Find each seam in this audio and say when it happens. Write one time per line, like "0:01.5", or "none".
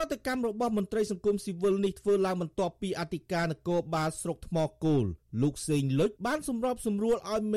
0:06.2